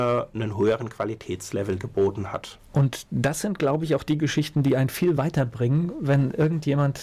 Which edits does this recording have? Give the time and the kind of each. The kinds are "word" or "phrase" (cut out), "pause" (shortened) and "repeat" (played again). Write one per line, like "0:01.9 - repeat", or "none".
none